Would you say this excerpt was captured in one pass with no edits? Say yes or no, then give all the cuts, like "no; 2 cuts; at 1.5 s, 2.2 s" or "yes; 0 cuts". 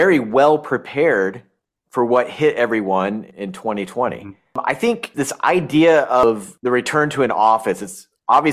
yes; 0 cuts